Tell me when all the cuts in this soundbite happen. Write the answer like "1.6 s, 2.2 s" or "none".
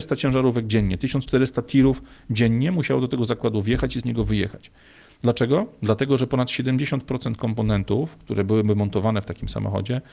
none